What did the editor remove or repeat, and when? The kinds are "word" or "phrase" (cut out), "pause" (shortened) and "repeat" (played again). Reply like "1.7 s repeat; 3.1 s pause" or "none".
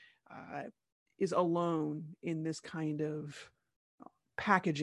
none

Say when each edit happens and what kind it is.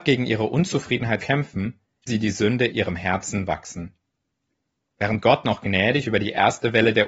1.2 s word; 2.1 s word; 2.7 s word

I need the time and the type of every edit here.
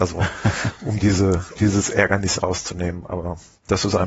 1.6 s word; 2.4 s phrase

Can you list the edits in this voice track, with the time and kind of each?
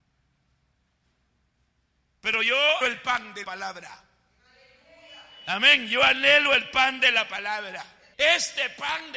2.8 s word; 3.4 s word; 8.1 s pause

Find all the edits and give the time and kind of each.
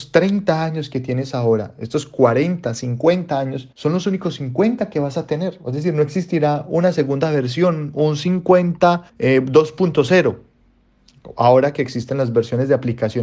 3.7 s pause; 9.1 s pause

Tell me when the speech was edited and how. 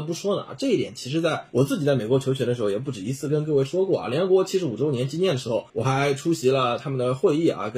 5.7 s pause

